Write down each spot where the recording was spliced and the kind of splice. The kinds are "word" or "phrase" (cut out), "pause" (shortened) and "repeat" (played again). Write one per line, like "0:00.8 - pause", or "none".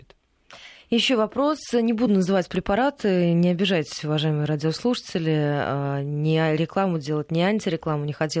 none